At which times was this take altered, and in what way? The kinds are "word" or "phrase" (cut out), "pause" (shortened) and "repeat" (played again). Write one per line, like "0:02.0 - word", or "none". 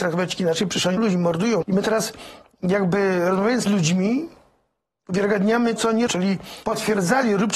0:01.0 - word
0:01.6 - word
0:03.7 - word
0:05.8 - word
0:06.1 - word
0:06.6 - word